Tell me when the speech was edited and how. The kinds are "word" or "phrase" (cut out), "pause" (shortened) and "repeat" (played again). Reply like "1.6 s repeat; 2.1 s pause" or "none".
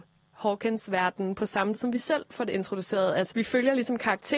1.7 s word; 3.3 s word